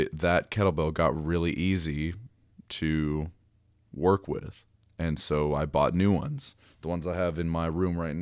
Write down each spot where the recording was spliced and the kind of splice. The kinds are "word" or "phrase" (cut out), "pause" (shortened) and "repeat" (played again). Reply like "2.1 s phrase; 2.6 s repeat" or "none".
4.8 s pause